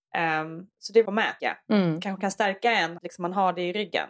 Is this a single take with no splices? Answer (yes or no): no